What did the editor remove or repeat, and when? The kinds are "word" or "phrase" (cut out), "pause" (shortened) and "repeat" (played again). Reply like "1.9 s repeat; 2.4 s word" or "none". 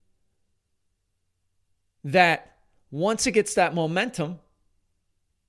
none

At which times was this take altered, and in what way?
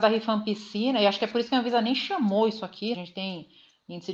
2.9 s phrase

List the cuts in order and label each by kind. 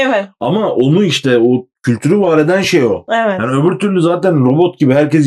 none

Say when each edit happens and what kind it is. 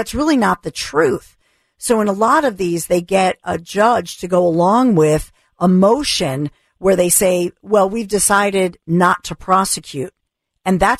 none

